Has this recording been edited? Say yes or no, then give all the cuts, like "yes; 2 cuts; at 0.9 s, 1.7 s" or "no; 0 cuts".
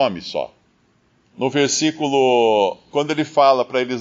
no; 0 cuts